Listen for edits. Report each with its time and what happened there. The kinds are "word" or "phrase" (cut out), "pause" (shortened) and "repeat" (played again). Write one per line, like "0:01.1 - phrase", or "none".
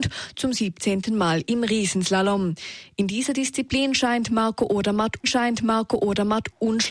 0:05.2 - repeat